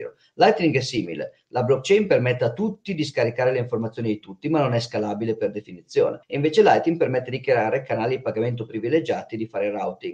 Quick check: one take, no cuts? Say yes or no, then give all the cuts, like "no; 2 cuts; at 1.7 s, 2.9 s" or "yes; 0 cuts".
no; 1 cut; at 6.2 s